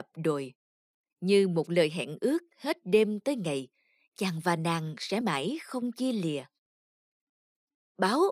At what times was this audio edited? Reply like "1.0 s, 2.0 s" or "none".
1.0 s, 5.2 s